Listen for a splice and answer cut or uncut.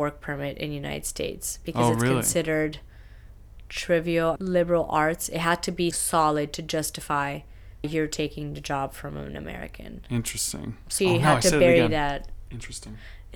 cut